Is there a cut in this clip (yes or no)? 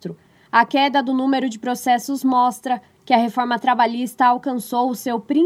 no